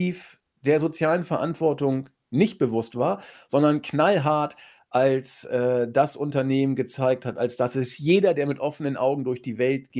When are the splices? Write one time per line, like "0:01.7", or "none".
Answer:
none